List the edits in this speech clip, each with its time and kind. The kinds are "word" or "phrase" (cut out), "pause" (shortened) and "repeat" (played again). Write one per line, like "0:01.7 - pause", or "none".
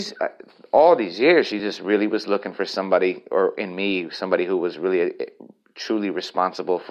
none

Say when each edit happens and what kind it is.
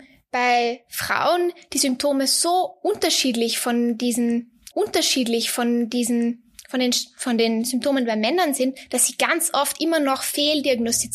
0:04.7 - repeat

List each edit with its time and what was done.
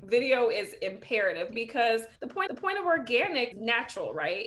0:01.5 - word
0:02.2 - pause
0:02.5 - repeat
0:03.5 - word

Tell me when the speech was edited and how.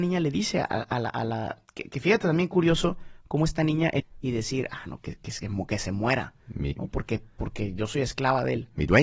0:04.0 - phrase

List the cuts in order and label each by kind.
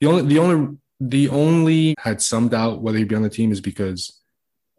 0:01.9 - phrase

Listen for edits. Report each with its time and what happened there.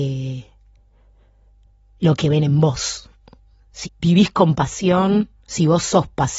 0:03.8 - word

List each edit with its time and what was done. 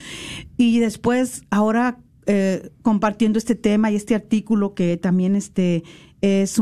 none

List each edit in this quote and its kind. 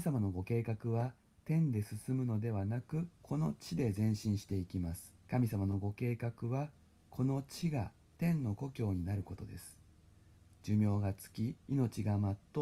0:03.1 - pause
0:05.2 - pause
0:11.6 - pause

